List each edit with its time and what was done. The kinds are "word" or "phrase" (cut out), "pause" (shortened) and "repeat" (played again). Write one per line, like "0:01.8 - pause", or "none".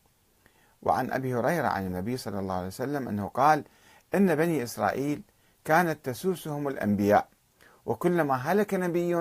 none

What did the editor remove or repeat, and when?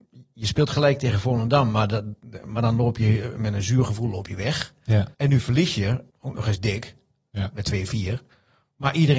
0:05.1 - pause
0:06.1 - pause

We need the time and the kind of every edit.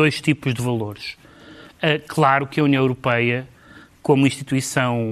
none

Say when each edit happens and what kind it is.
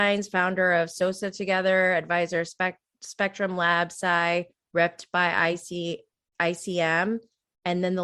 none

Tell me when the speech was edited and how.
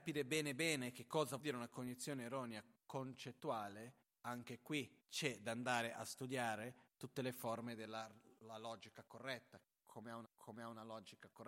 0:01.4 - word
0:02.8 - pause
0:05.0 - pause
0:10.2 - repeat

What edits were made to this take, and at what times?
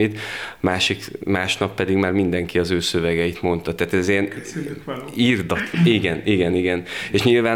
none

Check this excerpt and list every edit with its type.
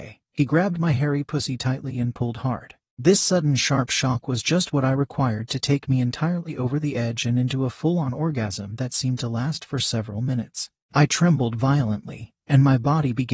none

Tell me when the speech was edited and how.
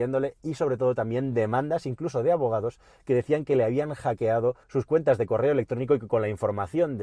0:04.6 - pause

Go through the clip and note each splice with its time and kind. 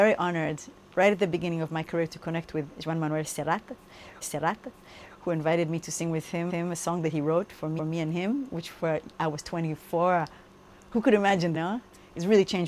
0:04.2 - repeat
0:06.5 - repeat
0:07.8 - repeat
0:11.5 - phrase

